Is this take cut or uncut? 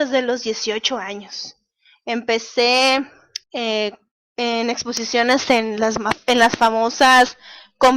cut